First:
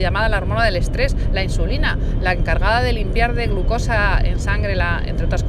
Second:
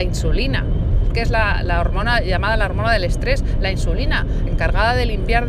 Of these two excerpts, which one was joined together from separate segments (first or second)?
second